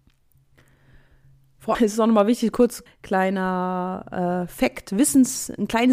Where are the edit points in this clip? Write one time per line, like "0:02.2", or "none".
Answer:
0:01.7
0:02.9